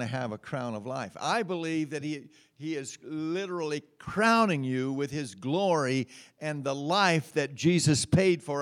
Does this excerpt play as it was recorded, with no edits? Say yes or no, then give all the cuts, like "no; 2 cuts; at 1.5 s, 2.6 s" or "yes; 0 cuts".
yes; 0 cuts